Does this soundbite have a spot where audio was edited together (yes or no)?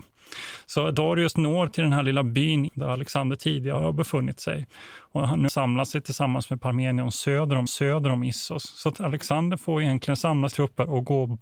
yes